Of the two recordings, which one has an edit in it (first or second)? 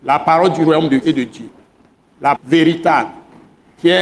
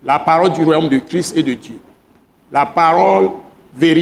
first